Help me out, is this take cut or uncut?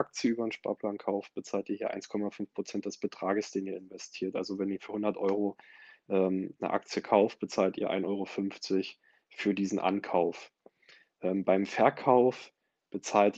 uncut